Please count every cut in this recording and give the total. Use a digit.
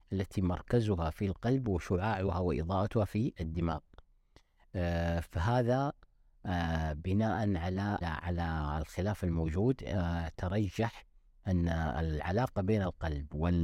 1